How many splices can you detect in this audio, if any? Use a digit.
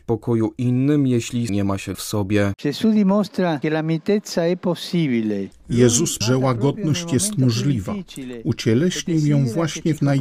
3